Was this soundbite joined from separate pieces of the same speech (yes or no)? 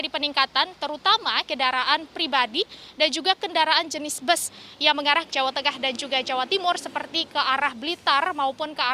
yes